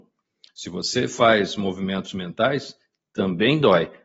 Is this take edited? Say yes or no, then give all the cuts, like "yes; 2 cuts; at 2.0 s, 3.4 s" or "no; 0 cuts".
no; 0 cuts